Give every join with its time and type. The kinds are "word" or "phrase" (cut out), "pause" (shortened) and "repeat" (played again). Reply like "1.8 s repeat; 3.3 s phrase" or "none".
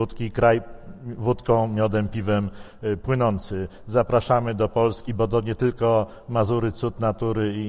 none